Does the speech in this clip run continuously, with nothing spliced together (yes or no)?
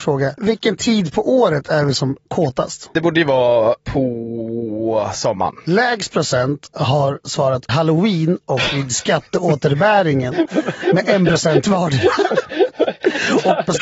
no